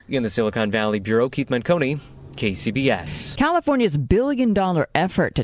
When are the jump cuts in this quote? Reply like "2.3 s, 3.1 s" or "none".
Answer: none